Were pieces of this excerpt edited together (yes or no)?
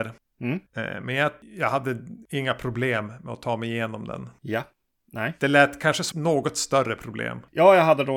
yes